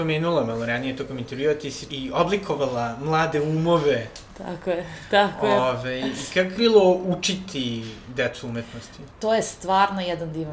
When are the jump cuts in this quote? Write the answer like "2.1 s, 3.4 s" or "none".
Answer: 1.9 s, 6.5 s